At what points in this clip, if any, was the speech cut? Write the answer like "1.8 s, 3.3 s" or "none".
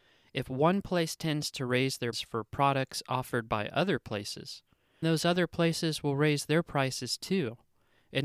2.1 s, 5.0 s